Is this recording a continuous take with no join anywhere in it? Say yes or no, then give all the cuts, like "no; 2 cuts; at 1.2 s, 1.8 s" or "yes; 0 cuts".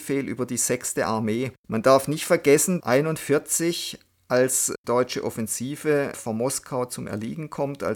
no; 3 cuts; at 1.6 s, 2.8 s, 4.8 s